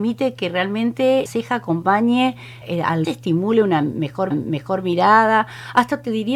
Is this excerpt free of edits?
no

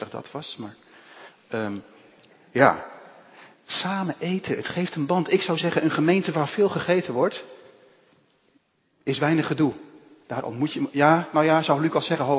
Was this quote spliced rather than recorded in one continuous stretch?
no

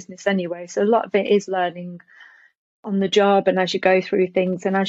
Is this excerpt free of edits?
yes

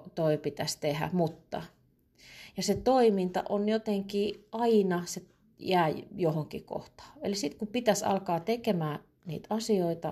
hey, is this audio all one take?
yes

